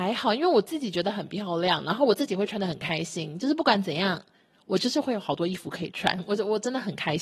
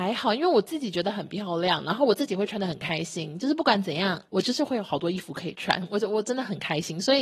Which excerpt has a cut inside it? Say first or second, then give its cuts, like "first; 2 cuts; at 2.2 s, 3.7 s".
second; 1 cut; at 4.3 s